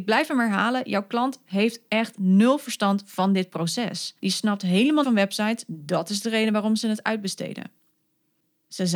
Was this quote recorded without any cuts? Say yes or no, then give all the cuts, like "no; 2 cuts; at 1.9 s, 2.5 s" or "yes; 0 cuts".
no; 2 cuts; at 4.2 s, 5.0 s